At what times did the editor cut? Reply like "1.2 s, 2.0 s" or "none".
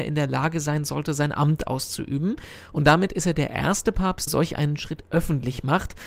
4.3 s